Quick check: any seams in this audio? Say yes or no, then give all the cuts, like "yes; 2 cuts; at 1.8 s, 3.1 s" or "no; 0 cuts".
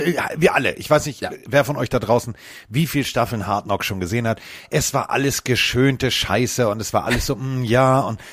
no; 0 cuts